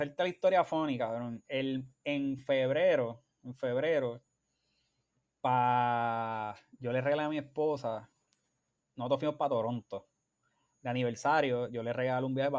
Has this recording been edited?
no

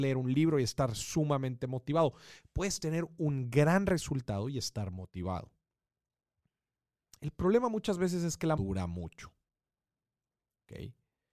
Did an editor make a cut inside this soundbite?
yes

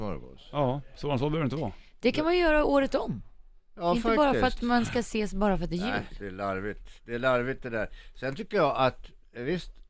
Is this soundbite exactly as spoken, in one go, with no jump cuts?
yes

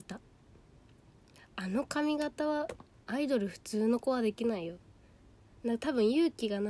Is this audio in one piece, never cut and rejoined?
yes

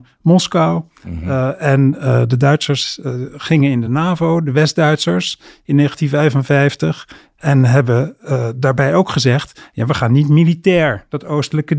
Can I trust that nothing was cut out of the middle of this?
yes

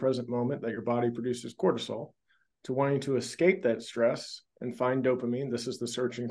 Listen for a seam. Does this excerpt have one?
no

